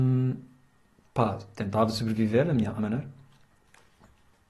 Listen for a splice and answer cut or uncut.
cut